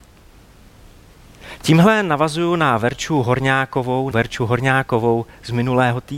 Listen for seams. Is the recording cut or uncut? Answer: cut